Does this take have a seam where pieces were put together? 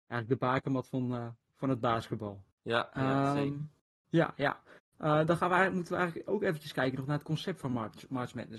yes; 2 cuts; at 2.5 s, 3.8 s

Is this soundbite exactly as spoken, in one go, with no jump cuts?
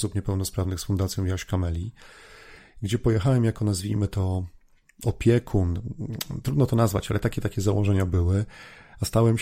yes; 0 cuts

